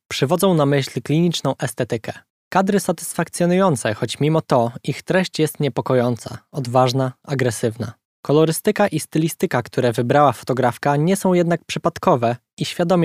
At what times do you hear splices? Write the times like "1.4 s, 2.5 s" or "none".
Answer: 2.8 s